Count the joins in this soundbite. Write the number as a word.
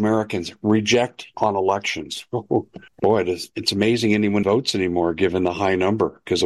three